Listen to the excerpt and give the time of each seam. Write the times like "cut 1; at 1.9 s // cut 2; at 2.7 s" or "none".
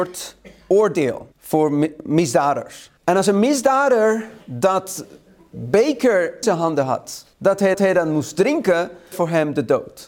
cut 1; at 1.3 s // cut 2; at 3.0 s // cut 3; at 4.4 s // cut 4; at 6.4 s // cut 5; at 7.3 s // cut 6; at 7.7 s // cut 7; at 9.1 s